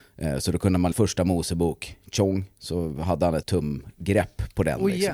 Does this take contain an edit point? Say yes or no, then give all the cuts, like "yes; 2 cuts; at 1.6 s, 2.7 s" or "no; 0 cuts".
yes; 2 cuts; at 0.9 s, 3.4 s